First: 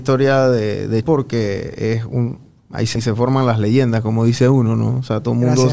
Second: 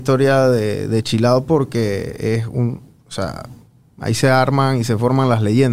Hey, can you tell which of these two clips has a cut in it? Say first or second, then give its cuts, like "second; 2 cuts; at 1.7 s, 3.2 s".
first; 3 cuts; at 1.0 s, 2.6 s, 3.0 s